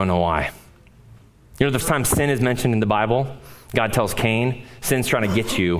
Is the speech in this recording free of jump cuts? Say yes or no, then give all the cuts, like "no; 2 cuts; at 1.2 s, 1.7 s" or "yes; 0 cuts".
no; 2 cuts; at 1.2 s, 1.8 s